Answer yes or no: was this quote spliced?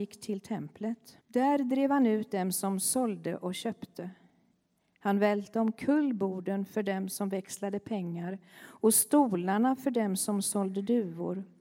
yes